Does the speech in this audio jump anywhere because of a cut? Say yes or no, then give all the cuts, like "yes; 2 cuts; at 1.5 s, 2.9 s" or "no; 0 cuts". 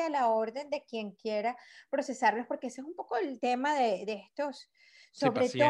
no; 0 cuts